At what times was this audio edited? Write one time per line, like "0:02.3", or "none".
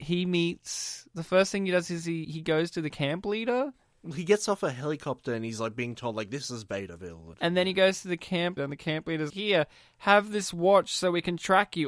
0:02.2
0:07.3
0:08.6
0:09.3